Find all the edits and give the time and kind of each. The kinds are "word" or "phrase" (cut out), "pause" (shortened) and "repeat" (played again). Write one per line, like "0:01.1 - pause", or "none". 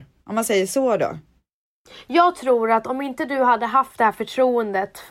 none